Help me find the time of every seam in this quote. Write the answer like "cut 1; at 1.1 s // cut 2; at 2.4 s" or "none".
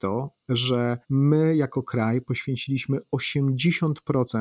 cut 1; at 1.0 s